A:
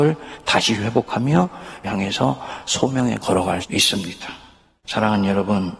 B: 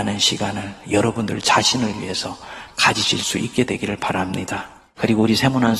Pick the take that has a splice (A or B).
A